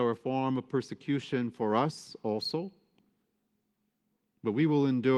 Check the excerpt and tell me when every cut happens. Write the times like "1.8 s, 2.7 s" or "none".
none